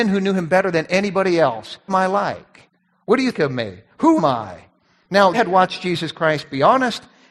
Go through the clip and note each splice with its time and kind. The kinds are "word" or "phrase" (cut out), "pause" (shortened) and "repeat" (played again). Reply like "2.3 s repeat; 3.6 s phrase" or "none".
1.9 s word; 3.3 s word; 4.2 s word; 5.3 s word

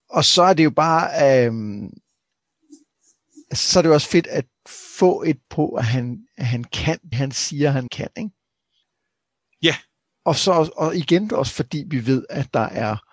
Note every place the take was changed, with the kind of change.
4.2 s word; 5.4 s word; 7.1 s word; 7.9 s word

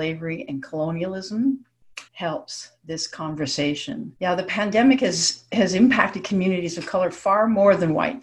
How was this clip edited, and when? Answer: 2.1 s pause; 4.2 s pause

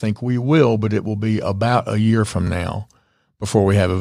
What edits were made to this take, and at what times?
none

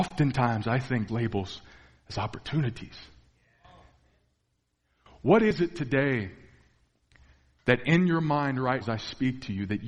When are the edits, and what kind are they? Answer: 1.1 s word; 8.8 s word

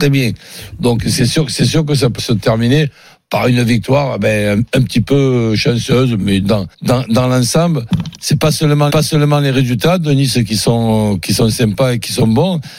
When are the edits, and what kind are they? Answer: 2.2 s word; 6.7 s pause; 8.9 s repeat

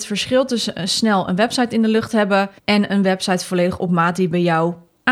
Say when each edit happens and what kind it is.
2.6 s pause

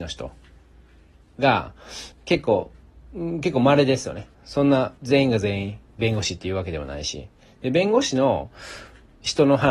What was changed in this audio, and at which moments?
2.1 s pause; 4.3 s pause; 5.0 s pause

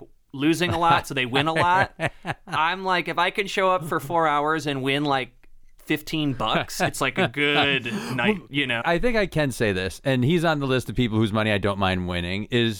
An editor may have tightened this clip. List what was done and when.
8.8 s word

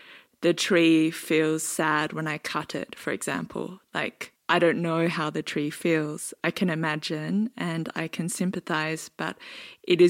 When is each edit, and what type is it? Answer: 4.4 s pause

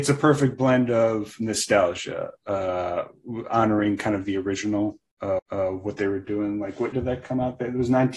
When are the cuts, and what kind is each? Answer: 5.4 s repeat; 6.9 s word

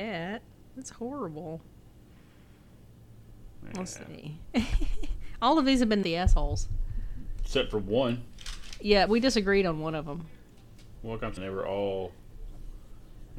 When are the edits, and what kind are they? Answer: 6.0 s word; 9.1 s word; 11.4 s word

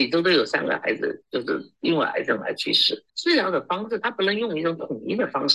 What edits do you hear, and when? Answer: 3.1 s pause

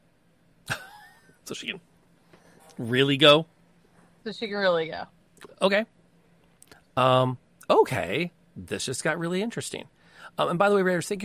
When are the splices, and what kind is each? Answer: none

